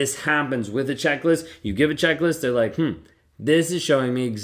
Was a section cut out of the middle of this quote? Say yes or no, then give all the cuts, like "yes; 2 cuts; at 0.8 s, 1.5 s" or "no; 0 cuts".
no; 0 cuts